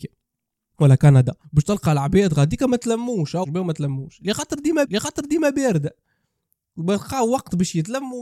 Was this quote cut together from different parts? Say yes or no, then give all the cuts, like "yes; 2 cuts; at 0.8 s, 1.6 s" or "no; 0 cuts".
yes; 3 cuts; at 1.4 s, 3.4 s, 4.8 s